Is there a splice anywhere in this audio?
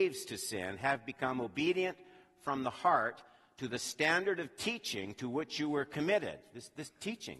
no; 0 cuts

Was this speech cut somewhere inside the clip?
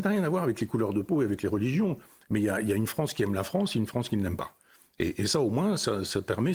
no; 0 cuts

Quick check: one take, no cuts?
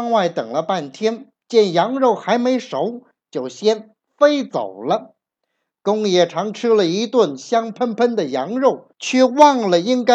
no; 1 cut; at 8.9 s

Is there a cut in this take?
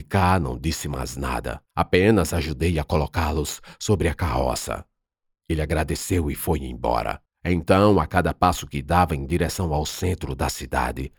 yes; 2 cuts; at 1.7 s, 7.3 s

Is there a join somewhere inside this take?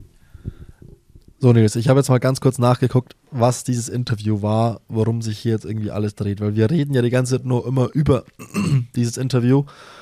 no; 0 cuts

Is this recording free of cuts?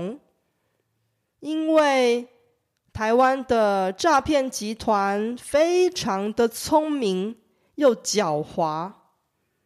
yes; 0 cuts

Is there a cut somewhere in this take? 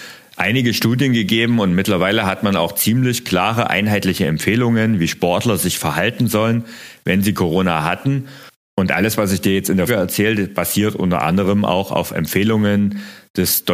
yes; 1 cut; at 9.9 s

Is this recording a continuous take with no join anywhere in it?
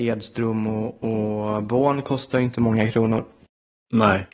yes; 0 cuts

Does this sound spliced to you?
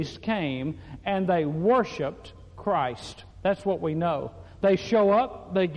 yes; 1 cut; at 3.3 s

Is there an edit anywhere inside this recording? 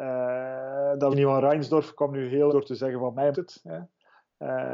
yes; 3 cuts; at 1.1 s, 2.5 s, 3.3 s

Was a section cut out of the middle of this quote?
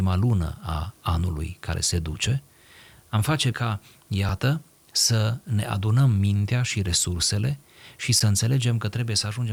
yes; 1 cut; at 3.5 s

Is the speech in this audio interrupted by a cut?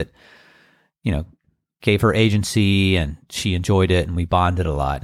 no; 0 cuts

